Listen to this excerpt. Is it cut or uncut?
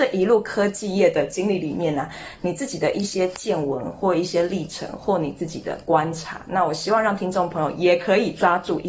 uncut